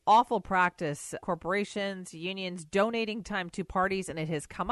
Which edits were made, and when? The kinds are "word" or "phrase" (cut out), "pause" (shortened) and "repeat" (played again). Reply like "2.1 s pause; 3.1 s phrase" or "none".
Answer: 1.2 s word; 3.2 s word; 3.7 s word